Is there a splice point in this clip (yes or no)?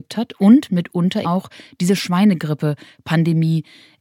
yes